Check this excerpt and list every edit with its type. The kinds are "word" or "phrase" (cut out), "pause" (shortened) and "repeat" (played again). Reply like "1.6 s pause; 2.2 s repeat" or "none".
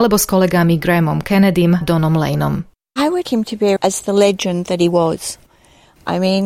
1.8 s word; 3.3 s word; 3.8 s word